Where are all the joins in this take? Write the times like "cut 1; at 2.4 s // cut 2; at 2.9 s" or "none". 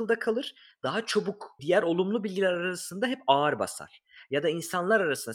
cut 1; at 1.6 s